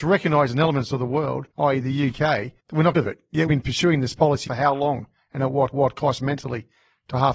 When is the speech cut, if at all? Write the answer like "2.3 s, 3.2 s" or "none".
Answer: 1.5 s, 2.6 s, 2.9 s, 3.5 s, 4.5 s, 5.7 s

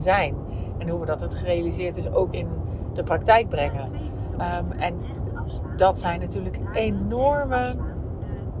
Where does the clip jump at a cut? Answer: 1.2 s, 2.3 s

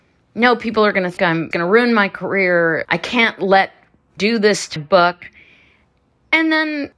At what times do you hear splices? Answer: 1.2 s, 1.5 s, 2.8 s, 4.2 s, 4.8 s

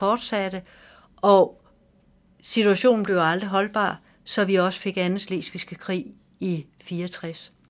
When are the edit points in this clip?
none

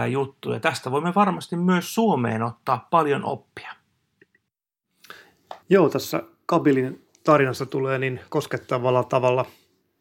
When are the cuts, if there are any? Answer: 5.6 s, 7.1 s

